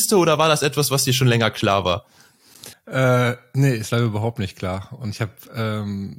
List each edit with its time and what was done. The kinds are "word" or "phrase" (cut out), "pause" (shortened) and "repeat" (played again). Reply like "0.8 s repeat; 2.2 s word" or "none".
2.7 s pause